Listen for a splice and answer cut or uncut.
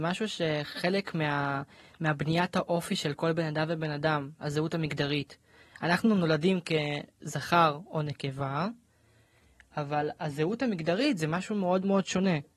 uncut